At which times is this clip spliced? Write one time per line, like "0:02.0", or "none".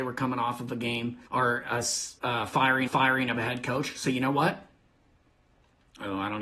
0:01.3
0:02.2
0:02.9